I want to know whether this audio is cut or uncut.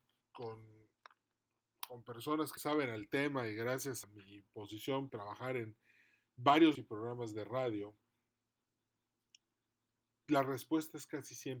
cut